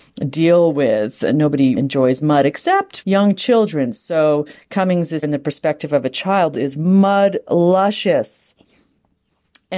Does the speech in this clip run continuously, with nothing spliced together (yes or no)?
no